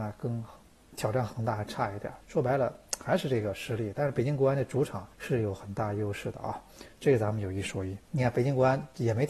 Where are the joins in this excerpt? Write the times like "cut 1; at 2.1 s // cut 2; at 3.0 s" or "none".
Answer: cut 1; at 2.2 s // cut 2; at 5.1 s // cut 3; at 8.0 s